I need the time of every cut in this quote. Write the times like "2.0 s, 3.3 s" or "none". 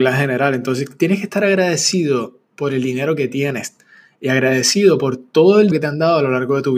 5.7 s